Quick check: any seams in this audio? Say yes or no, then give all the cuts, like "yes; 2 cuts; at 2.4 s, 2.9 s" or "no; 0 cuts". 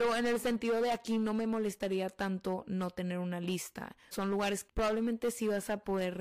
yes; 2 cuts; at 4.1 s, 4.7 s